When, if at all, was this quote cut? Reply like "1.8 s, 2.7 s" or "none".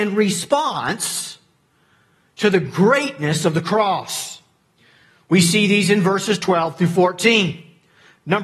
none